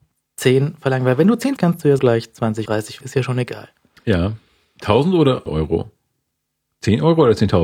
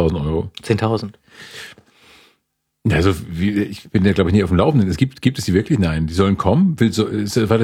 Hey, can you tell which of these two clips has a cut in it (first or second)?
first